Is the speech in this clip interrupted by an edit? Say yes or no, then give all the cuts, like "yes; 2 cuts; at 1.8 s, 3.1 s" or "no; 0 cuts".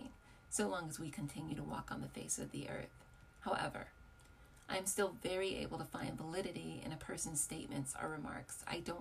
no; 0 cuts